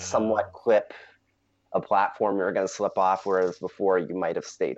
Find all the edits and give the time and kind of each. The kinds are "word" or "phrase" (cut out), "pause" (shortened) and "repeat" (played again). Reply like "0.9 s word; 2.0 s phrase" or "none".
none